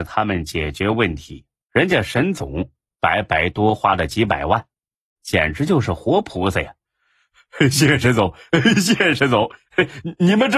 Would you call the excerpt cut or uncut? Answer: uncut